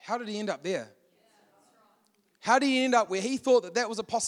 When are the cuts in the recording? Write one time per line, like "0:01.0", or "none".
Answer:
none